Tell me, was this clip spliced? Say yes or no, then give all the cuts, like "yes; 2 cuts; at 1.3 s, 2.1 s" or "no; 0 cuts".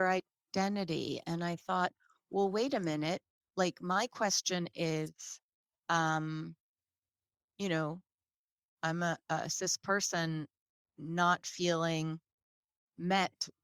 no; 0 cuts